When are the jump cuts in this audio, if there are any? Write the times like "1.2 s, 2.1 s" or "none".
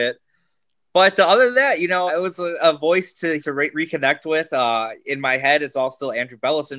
2.1 s, 3.4 s

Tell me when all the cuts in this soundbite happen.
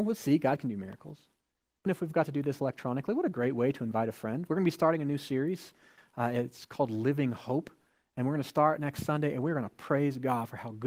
1.9 s

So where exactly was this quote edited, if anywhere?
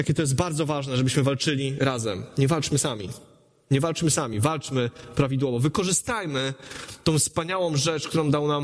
none

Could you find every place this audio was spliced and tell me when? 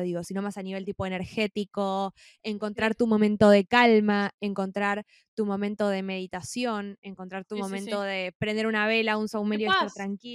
none

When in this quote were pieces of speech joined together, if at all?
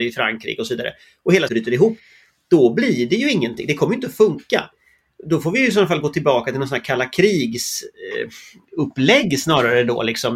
1.5 s

